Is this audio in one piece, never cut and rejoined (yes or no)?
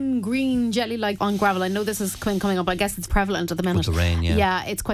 no